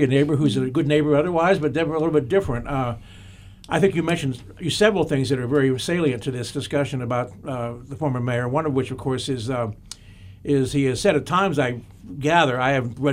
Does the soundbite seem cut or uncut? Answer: uncut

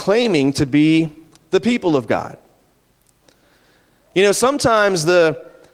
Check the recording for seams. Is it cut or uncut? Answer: uncut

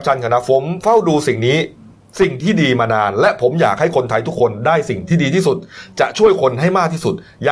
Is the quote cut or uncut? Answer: uncut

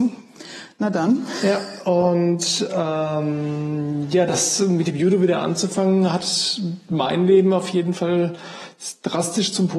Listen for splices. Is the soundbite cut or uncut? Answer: uncut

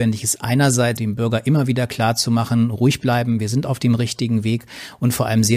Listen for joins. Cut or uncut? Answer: cut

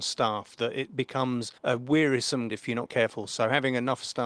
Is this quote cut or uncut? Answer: cut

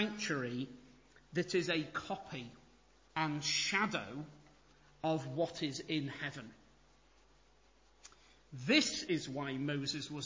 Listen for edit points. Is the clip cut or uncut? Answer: uncut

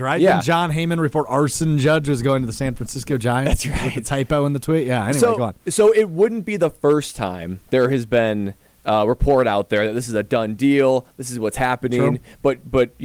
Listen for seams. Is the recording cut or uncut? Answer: uncut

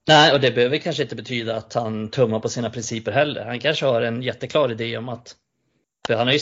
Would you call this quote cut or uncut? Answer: uncut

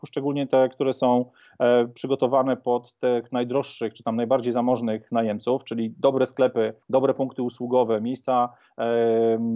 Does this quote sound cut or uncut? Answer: cut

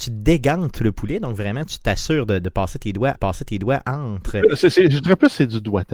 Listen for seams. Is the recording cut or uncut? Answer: cut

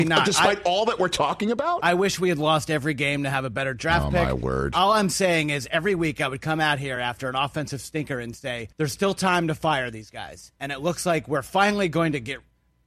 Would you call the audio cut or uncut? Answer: cut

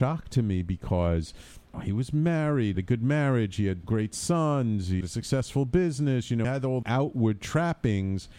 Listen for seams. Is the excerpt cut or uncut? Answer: cut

